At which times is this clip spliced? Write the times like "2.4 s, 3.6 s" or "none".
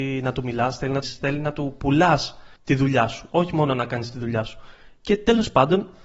1.0 s, 2.6 s